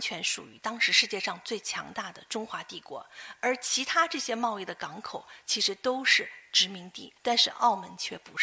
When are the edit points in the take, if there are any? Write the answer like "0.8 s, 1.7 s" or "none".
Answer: 7.2 s

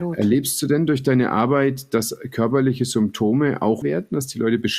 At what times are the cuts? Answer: 3.8 s

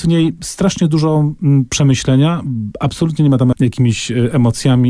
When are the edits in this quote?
3.5 s

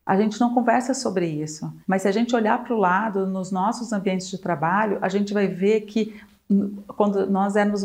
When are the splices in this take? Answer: 1.8 s

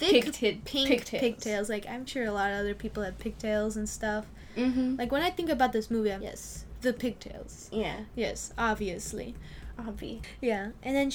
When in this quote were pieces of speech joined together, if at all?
2.1 s, 6.2 s

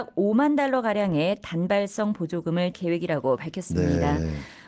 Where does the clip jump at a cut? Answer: 2.7 s

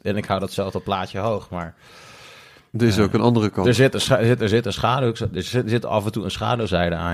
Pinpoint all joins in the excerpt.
none

